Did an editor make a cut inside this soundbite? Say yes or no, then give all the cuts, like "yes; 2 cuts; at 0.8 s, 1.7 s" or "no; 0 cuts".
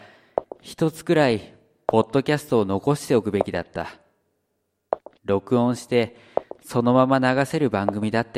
no; 0 cuts